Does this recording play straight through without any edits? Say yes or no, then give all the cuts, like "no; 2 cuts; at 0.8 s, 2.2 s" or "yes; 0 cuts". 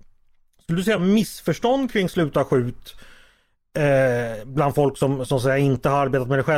yes; 0 cuts